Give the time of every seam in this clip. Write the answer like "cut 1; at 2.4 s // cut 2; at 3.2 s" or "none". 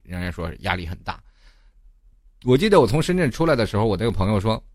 none